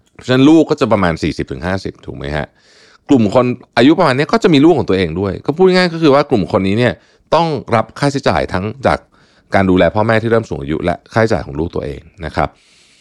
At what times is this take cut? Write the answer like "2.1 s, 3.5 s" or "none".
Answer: none